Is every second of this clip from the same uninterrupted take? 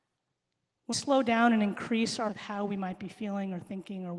no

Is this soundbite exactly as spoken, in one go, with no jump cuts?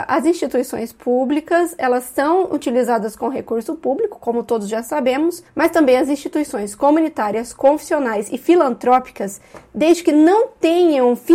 yes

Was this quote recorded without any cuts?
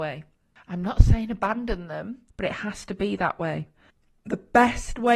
no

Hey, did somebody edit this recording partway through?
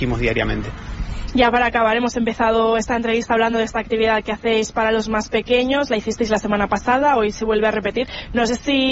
no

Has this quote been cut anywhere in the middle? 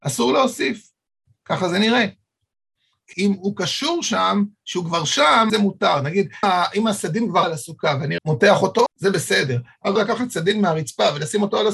yes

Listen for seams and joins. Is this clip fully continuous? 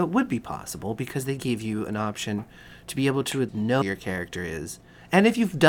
no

